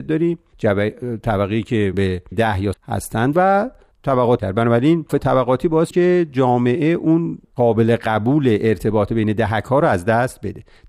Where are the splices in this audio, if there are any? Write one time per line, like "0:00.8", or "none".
0:01.9
0:02.3
0:02.7
0:03.3
0:04.4
0:05.1
0:05.9
0:07.4